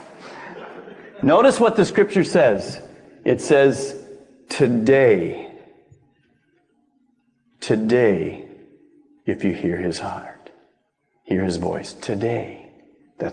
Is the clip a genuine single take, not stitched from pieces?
yes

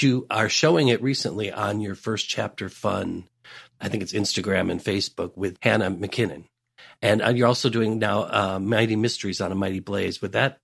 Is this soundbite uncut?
yes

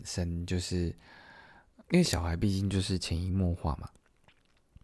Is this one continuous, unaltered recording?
no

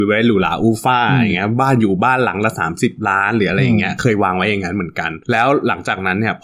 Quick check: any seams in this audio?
yes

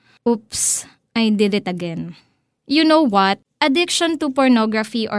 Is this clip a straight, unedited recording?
yes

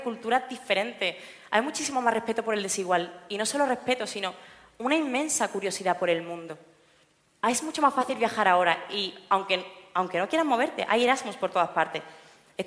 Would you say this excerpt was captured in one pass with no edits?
yes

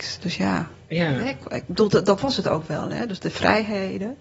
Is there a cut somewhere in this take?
no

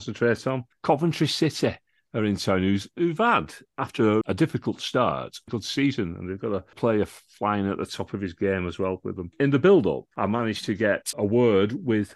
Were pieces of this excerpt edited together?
yes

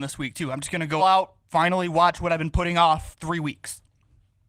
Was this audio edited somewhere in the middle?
yes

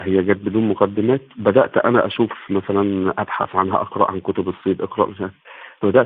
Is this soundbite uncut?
yes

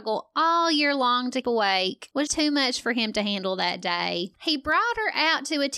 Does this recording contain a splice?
yes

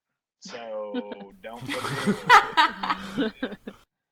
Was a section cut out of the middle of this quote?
no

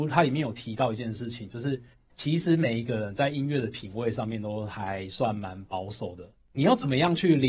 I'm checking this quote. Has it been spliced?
no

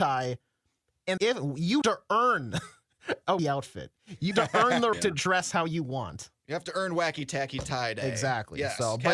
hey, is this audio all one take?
no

